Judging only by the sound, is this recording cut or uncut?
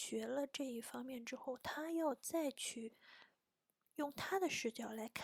uncut